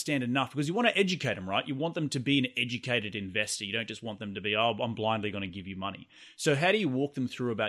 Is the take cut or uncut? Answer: uncut